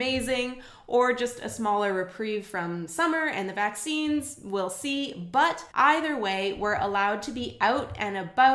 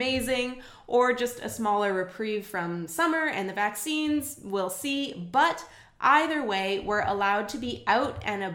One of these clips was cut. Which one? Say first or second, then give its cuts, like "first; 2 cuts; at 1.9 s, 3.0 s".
first; 1 cut; at 5.7 s